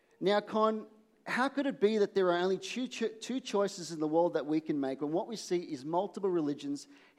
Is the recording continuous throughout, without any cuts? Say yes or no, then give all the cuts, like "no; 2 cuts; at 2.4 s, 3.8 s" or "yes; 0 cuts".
yes; 0 cuts